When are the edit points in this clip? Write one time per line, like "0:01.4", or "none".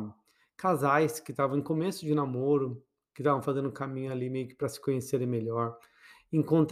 none